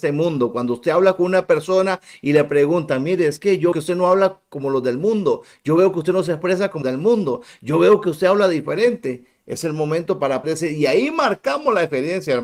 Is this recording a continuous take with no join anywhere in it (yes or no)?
no